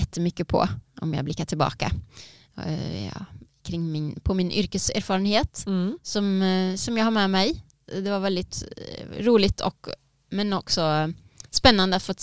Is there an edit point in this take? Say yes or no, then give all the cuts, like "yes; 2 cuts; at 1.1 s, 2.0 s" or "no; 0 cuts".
no; 0 cuts